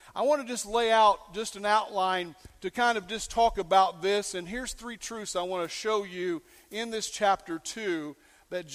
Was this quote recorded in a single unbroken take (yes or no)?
yes